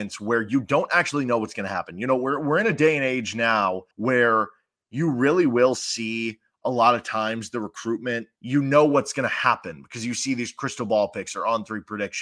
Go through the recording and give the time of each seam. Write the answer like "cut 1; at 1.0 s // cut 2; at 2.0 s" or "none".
cut 1; at 3.9 s // cut 2; at 8.3 s